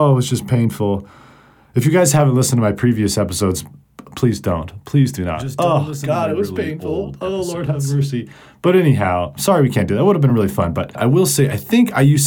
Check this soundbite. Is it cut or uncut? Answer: uncut